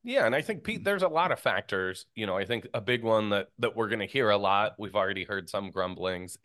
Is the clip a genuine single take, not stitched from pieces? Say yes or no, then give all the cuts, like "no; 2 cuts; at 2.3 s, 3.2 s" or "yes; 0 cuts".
yes; 0 cuts